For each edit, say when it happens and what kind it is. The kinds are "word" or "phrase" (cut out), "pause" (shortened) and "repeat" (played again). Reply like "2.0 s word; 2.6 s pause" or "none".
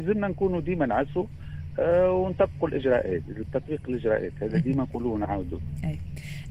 none